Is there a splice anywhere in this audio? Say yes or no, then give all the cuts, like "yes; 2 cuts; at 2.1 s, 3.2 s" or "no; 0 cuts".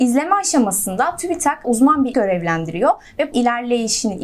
yes; 3 cuts; at 1.6 s, 2.1 s, 3.3 s